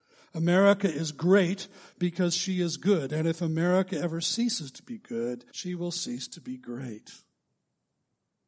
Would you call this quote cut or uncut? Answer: cut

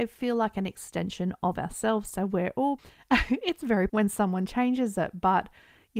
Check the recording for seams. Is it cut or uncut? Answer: cut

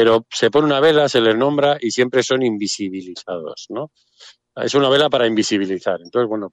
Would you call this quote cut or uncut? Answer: uncut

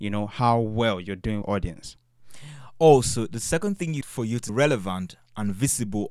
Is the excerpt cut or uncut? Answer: cut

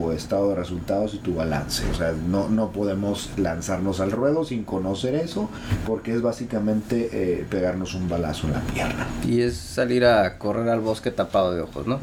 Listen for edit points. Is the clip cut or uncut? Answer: uncut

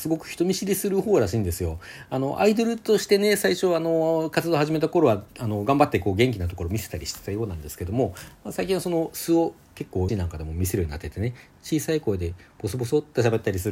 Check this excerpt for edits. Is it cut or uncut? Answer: cut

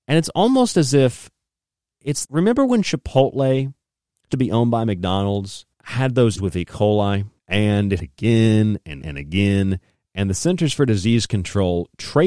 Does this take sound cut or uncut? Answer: cut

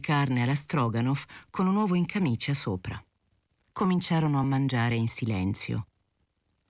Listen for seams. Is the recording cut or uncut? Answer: uncut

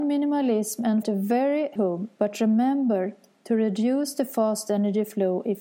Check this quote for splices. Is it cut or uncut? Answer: cut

